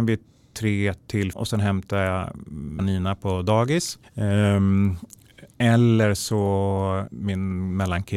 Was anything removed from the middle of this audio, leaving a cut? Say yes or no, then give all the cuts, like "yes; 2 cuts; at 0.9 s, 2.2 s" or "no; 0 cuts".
yes; 4 cuts; at 1.3 s, 2.8 s, 4.0 s, 7.1 s